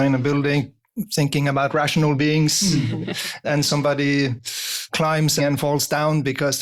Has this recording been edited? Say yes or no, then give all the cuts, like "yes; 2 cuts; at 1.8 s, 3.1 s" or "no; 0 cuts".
yes; 3 cuts; at 3.4 s, 4.9 s, 5.4 s